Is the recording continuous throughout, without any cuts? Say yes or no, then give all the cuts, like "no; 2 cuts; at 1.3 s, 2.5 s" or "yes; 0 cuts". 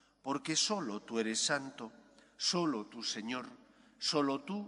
yes; 0 cuts